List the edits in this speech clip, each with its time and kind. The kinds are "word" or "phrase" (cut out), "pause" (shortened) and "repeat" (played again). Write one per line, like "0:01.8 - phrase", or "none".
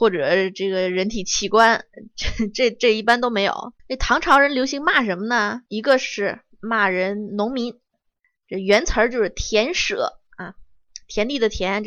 0:03.8 - pause
0:05.7 - pause